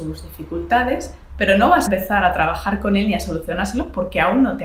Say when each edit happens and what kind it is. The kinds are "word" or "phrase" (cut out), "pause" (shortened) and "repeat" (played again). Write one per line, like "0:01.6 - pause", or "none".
0:01.9 - word